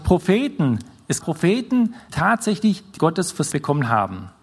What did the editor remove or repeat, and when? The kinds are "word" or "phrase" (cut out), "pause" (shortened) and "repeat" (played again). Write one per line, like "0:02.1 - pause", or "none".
0:01.2 - word
0:02.1 - word
0:03.0 - word
0:03.5 - word